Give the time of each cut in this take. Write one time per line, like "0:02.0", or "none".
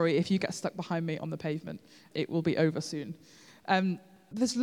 none